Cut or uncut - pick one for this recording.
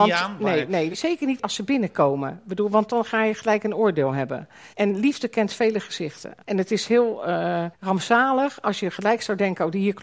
cut